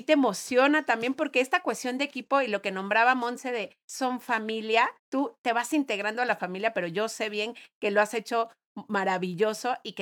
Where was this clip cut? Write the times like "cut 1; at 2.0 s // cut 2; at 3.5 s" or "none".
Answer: cut 1; at 5.0 s